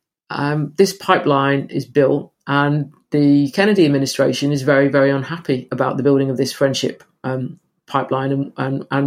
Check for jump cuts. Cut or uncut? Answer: uncut